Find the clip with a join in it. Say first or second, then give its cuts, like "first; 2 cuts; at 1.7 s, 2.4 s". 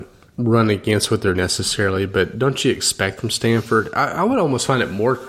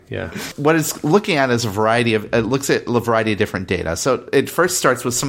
first; 2 cuts; at 1.3 s, 3.2 s